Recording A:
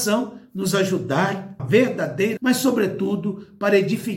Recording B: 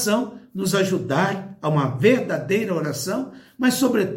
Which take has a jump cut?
A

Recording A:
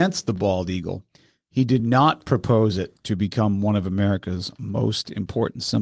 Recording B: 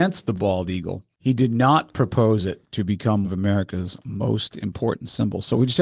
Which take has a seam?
B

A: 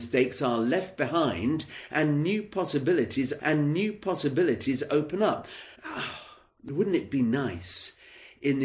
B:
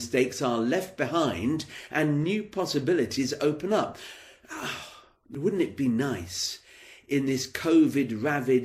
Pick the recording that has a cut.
A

